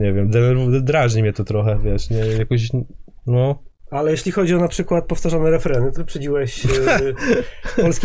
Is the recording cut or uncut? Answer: cut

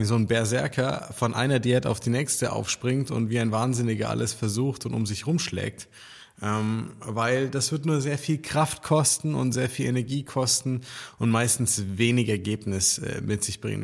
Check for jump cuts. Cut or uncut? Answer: uncut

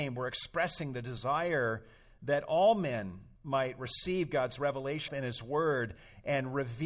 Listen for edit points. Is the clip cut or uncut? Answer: cut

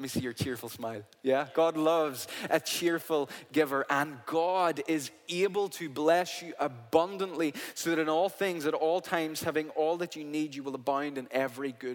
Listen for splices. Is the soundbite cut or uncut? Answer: uncut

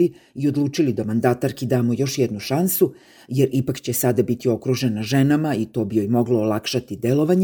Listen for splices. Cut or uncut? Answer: uncut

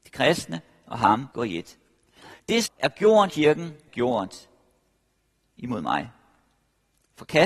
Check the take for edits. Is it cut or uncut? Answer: cut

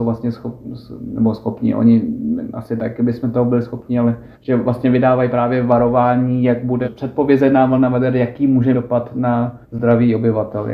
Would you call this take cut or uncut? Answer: cut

